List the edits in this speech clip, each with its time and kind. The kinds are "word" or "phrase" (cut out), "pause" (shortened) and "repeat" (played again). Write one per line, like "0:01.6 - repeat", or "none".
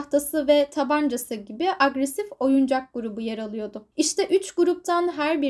0:03.9 - pause